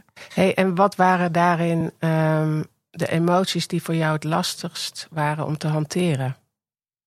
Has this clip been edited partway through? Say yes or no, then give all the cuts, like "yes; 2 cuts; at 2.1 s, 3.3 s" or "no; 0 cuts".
no; 0 cuts